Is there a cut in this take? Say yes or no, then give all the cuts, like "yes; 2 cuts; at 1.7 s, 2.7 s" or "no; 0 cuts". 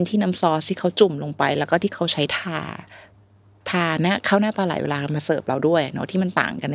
no; 0 cuts